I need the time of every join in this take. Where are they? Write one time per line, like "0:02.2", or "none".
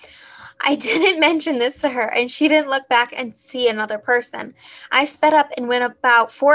none